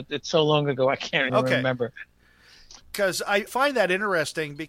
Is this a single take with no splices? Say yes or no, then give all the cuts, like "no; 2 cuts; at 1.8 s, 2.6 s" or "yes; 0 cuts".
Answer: no; 3 cuts; at 1.3 s, 2.8 s, 3.5 s